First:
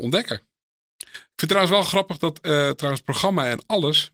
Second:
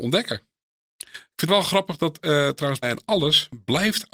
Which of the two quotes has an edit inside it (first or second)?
second